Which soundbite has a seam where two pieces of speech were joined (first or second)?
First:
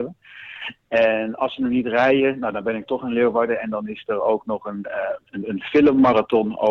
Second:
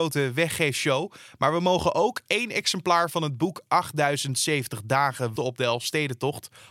second